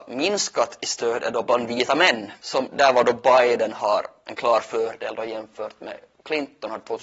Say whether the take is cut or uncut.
uncut